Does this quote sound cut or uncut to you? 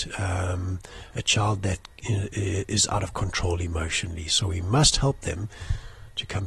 uncut